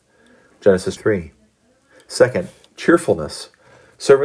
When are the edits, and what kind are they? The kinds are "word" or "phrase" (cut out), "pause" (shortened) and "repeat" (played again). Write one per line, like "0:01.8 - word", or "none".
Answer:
0:01.0 - word